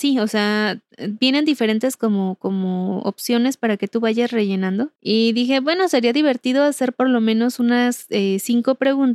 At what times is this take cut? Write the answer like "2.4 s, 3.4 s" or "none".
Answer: 5.0 s